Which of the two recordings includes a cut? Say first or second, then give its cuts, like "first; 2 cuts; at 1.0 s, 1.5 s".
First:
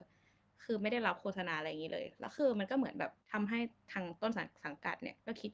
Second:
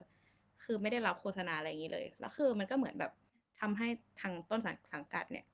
first; 1 cut; at 3.2 s